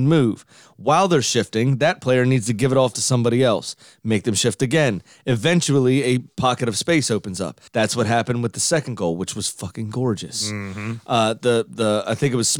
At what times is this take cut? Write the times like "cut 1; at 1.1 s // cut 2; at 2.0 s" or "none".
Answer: cut 1; at 7.7 s